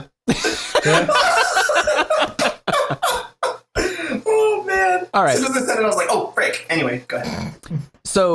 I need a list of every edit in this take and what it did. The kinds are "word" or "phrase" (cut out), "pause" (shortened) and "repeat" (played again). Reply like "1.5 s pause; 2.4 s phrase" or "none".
none